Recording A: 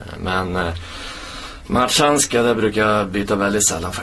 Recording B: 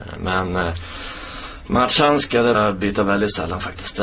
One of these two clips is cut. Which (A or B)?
B